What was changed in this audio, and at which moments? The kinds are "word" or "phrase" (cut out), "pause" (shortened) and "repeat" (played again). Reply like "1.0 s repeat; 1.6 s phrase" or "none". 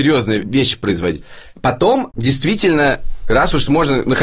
none